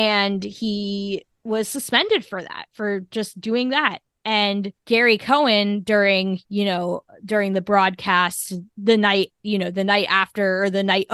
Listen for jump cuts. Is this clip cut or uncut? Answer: cut